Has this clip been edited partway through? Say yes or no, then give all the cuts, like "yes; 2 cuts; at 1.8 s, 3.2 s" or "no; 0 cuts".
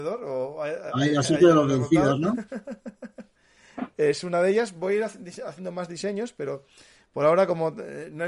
no; 0 cuts